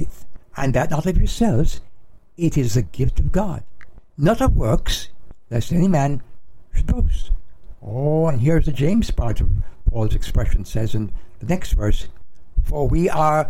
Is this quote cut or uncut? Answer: uncut